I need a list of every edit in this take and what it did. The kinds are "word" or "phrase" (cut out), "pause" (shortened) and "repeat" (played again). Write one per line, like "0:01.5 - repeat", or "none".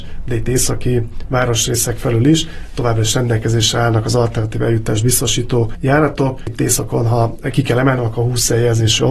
none